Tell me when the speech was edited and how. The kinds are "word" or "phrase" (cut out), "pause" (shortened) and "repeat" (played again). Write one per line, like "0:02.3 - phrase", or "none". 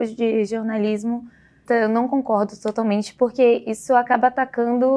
0:01.7 - word